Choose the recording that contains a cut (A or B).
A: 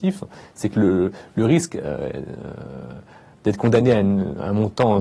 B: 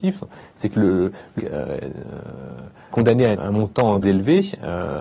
B